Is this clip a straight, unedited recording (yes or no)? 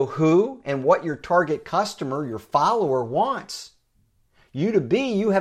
yes